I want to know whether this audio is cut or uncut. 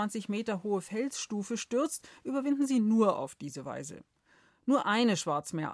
uncut